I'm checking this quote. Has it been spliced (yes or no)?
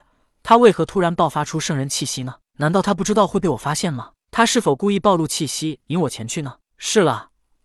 yes